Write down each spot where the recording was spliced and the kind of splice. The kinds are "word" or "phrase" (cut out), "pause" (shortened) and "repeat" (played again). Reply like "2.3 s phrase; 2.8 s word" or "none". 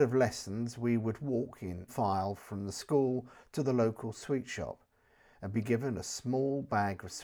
1.9 s word